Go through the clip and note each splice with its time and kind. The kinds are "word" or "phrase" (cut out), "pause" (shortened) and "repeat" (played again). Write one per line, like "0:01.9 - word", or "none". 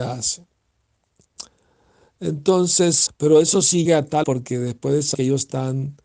0:03.1 - word
0:03.8 - word
0:04.2 - word
0:05.1 - word